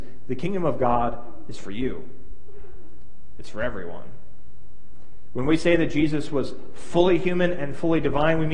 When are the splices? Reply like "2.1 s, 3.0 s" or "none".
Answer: none